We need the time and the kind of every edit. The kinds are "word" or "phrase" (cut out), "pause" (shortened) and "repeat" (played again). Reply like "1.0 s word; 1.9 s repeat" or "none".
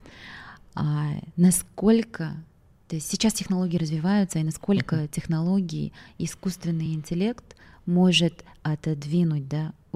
none